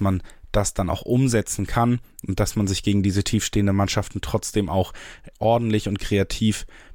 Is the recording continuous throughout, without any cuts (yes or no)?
yes